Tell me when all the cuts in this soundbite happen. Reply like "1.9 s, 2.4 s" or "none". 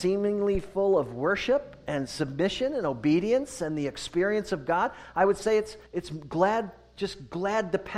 5.9 s